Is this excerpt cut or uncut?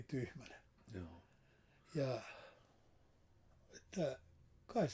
uncut